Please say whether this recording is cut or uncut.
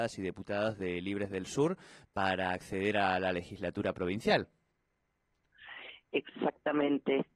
uncut